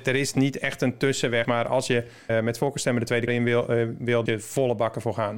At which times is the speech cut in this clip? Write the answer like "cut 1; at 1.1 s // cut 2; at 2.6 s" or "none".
cut 1; at 1.4 s // cut 2; at 2.3 s // cut 3; at 3.3 s // cut 4; at 4.3 s